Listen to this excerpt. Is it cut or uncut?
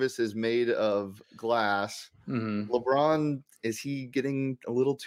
uncut